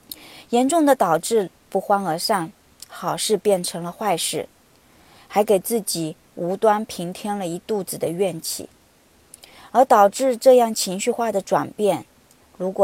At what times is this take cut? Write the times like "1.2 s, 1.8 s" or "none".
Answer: none